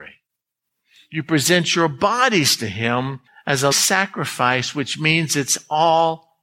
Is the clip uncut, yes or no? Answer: no